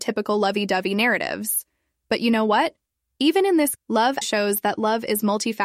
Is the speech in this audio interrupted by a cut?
yes; 2 cuts; at 3.7 s, 4.2 s

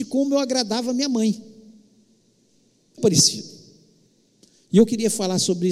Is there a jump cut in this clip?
yes; 1 cut; at 3.0 s

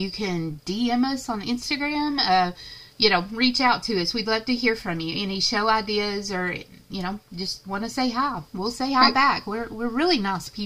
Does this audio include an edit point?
no; 0 cuts

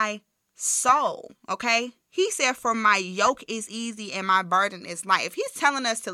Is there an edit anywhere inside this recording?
no; 0 cuts

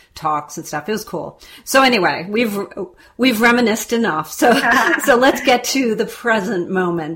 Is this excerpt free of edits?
yes; 0 cuts

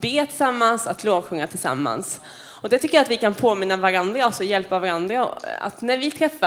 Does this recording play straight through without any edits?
yes; 0 cuts

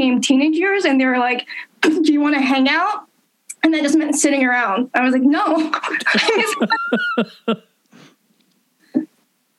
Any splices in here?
no; 0 cuts

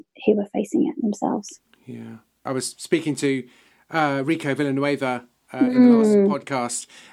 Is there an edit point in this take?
no; 0 cuts

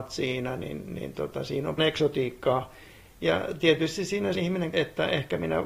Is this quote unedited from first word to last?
no; 3 cuts; at 1.8 s, 4.3 s, 4.7 s

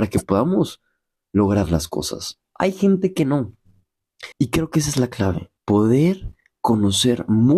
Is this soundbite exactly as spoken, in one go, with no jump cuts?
no; 2 cuts; at 4.3 s, 5.6 s

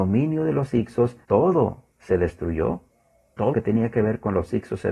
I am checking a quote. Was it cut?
yes; 2 cuts; at 1.2 s, 3.5 s

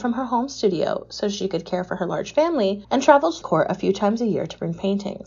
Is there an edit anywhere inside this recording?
yes; 2 cuts; at 2.8 s, 3.4 s

